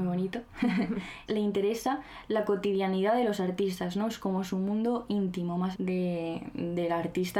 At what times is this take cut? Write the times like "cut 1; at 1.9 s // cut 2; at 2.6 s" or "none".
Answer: cut 1; at 1.3 s // cut 2; at 5.7 s